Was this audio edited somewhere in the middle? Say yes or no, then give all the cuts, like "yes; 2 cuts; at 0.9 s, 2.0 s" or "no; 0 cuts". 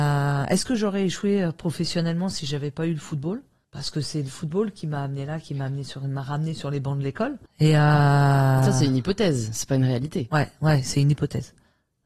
no; 0 cuts